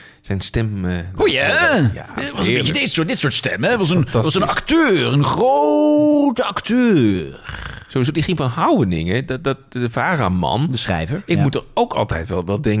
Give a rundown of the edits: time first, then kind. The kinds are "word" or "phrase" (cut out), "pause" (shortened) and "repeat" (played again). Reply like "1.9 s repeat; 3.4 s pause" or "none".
none